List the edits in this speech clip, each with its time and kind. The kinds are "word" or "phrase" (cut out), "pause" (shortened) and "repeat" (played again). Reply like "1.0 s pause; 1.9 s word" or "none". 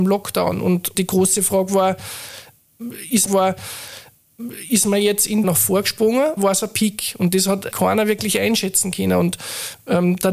0.9 s word; 3.3 s repeat; 5.4 s phrase; 6.4 s word; 7.7 s word